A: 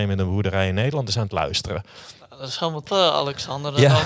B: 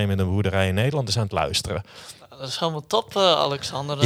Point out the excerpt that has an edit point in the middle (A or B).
A